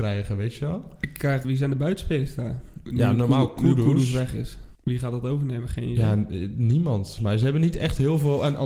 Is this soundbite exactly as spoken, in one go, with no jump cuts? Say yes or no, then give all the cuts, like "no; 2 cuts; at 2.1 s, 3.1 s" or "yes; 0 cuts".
no; 3 cuts; at 1.4 s, 4.7 s, 7.2 s